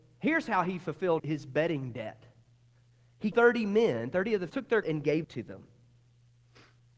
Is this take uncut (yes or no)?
no